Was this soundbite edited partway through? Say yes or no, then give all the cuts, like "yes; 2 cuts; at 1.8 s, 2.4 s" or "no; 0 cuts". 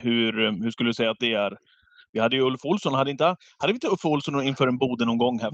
no; 0 cuts